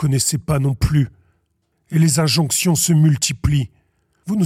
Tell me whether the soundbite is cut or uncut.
uncut